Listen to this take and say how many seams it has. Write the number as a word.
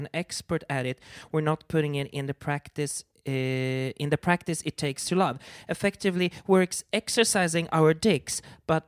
zero